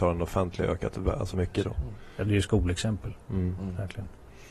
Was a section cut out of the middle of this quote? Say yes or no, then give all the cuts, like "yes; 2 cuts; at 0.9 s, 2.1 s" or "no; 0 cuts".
yes; 2 cuts; at 1.3 s, 2.2 s